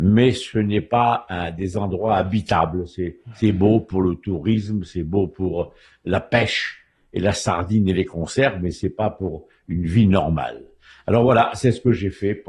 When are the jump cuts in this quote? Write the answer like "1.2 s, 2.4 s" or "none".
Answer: none